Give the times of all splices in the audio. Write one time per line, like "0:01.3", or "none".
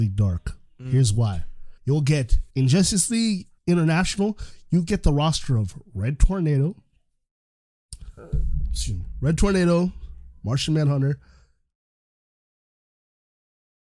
0:01.8
0:02.5
0:03.6